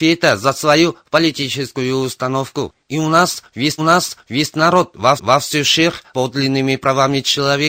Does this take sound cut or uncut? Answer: cut